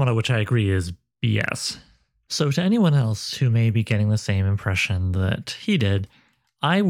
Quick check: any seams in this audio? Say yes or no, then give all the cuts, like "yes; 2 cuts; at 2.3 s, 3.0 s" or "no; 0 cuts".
no; 0 cuts